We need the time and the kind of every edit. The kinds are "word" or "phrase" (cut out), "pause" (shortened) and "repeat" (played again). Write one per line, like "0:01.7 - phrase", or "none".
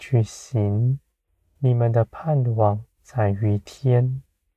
0:01.3 - pause
0:02.9 - pause